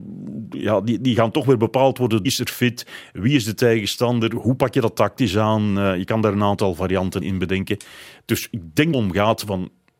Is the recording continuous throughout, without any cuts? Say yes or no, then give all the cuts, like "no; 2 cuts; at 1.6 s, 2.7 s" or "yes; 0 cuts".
no; 3 cuts; at 2.2 s, 7.2 s, 8.9 s